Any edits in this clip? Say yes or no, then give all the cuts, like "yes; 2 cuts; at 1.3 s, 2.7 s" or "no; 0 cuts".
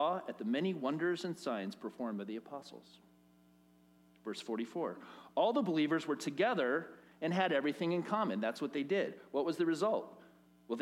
no; 0 cuts